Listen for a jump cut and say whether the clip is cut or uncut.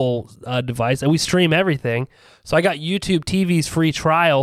uncut